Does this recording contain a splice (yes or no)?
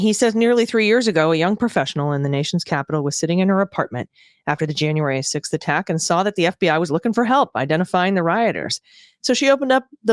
no